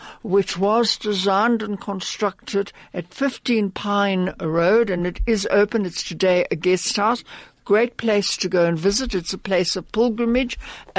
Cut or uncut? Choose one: uncut